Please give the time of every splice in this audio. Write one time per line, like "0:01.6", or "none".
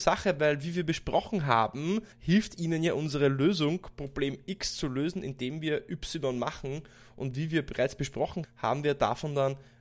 0:02.1
0:08.4